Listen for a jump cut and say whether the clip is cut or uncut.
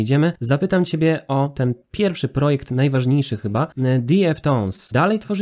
uncut